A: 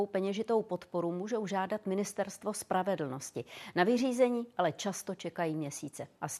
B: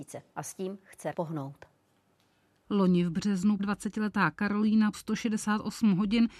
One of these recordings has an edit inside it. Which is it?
B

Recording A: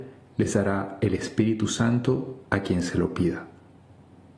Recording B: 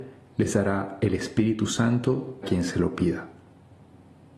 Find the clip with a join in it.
B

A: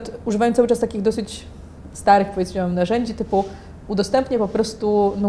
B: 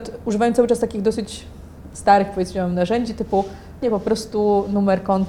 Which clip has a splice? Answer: B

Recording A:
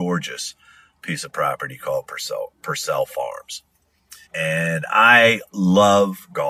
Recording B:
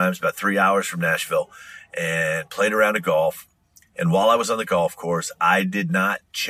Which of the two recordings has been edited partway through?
A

